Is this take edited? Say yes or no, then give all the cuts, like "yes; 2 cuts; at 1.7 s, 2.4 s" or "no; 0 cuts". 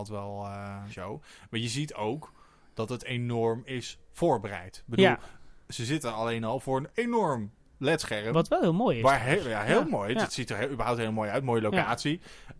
yes; 1 cut; at 0.9 s